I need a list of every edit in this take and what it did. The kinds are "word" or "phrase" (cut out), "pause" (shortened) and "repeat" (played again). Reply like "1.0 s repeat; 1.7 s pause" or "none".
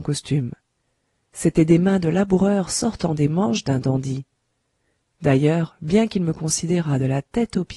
none

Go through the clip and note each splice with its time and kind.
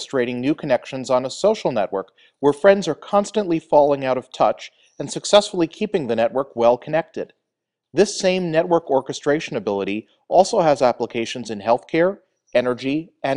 none

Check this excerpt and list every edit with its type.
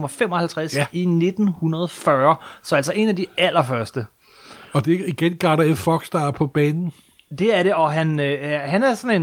none

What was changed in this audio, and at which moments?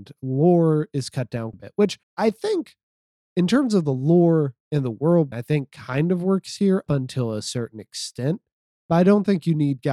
1.5 s word; 2.0 s pause; 5.3 s word; 6.9 s word

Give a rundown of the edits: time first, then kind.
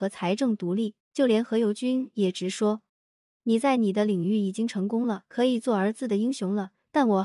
1.0 s pause; 2.9 s pause

